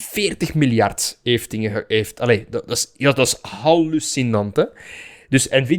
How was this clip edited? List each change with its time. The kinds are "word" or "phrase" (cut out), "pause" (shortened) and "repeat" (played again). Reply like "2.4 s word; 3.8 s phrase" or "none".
none